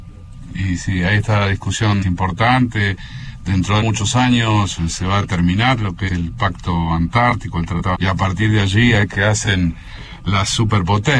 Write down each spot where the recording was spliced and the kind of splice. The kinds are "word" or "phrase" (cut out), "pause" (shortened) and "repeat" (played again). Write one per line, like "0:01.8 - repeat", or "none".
0:02.0 - word
0:03.8 - word
0:06.1 - word
0:07.9 - word
0:09.1 - word